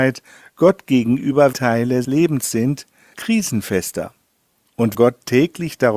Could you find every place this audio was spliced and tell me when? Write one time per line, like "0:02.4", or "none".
0:01.5
0:02.0
0:03.1
0:04.9